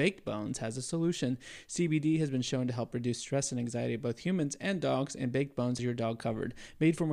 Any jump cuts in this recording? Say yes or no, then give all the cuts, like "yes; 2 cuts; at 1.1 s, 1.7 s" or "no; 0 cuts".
yes; 1 cut; at 5.8 s